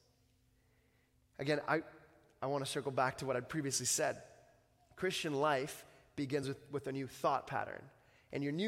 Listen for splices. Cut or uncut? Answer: uncut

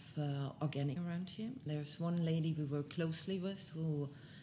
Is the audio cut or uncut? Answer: cut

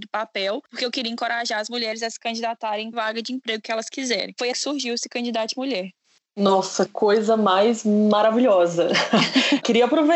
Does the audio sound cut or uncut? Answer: cut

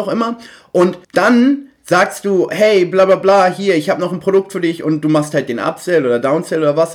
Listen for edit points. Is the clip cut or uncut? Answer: cut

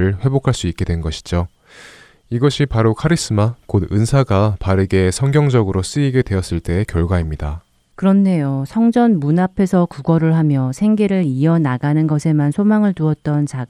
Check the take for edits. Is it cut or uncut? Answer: uncut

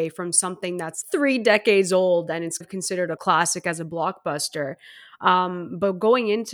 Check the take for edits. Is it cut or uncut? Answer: cut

